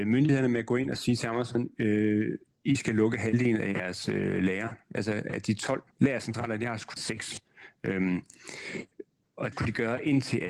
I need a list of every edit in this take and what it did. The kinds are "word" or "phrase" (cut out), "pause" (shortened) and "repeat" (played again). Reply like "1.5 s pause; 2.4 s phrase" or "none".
5.9 s pause; 7.0 s phrase; 9.5 s word